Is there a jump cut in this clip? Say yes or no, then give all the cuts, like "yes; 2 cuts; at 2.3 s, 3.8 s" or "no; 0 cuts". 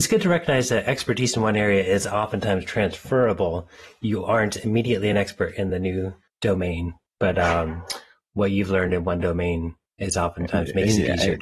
no; 0 cuts